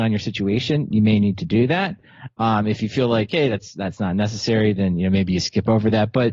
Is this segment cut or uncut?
uncut